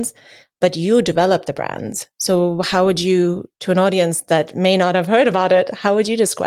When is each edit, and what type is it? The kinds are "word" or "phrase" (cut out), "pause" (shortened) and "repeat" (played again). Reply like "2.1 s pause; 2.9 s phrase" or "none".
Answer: 3.5 s pause